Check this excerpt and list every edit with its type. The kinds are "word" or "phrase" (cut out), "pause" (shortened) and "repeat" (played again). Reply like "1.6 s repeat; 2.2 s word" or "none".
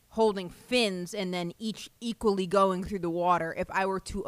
none